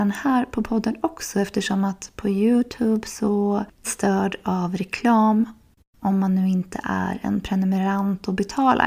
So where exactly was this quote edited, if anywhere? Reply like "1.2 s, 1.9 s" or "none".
3.8 s